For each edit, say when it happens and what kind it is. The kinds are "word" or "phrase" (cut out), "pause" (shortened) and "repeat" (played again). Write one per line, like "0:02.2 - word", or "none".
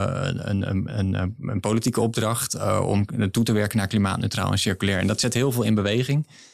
none